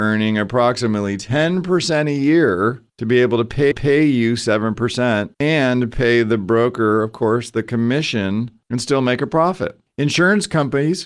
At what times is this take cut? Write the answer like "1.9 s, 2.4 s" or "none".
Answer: 2.9 s, 3.7 s, 5.3 s